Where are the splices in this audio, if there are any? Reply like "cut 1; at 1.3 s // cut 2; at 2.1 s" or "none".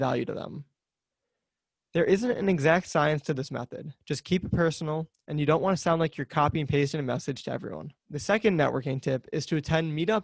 cut 1; at 4.0 s // cut 2; at 8.0 s

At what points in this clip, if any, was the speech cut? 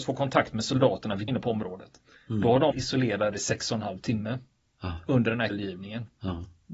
cut 1; at 1.3 s // cut 2; at 2.7 s // cut 3; at 3.3 s // cut 4; at 5.5 s

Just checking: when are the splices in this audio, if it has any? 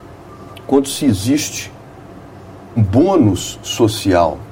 cut 1; at 2.8 s

